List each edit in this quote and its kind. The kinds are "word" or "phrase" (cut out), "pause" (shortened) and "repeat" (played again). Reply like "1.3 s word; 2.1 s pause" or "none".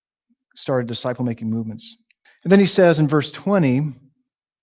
2.2 s pause